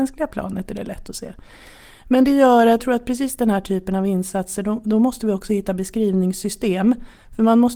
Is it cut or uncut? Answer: cut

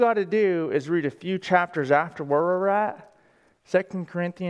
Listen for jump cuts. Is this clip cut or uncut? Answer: uncut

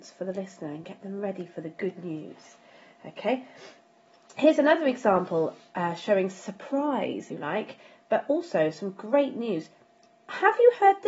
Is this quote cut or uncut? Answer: cut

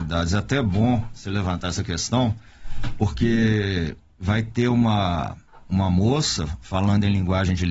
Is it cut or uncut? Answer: uncut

